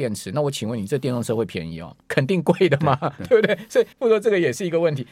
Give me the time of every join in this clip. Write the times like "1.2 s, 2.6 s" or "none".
2.0 s, 3.9 s